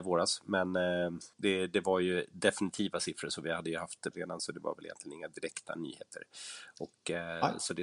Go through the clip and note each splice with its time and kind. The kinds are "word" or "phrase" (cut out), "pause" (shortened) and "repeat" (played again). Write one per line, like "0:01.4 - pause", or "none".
0:01.3 - pause
0:04.1 - word